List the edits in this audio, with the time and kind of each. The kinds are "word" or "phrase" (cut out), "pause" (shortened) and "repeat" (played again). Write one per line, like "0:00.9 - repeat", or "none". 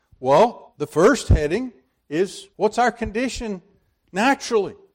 0:02.5 - pause